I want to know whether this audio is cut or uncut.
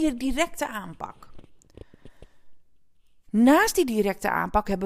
uncut